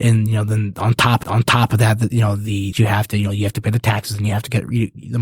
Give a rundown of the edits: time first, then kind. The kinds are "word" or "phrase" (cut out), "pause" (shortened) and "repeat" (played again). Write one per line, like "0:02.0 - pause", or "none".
0:01.2 - repeat
0:02.7 - phrase